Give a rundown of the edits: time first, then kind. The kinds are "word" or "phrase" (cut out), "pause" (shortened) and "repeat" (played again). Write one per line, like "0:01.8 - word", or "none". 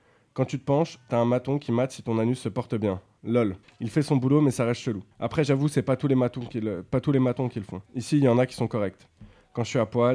0:03.6 - pause
0:05.1 - pause
0:07.9 - pause